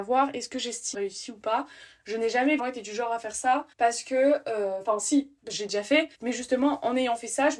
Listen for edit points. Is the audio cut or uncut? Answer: cut